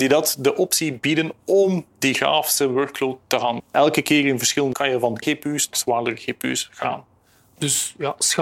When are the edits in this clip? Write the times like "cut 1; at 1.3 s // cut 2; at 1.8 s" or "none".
cut 1; at 3.6 s // cut 2; at 4.7 s // cut 3; at 5.2 s // cut 4; at 5.7 s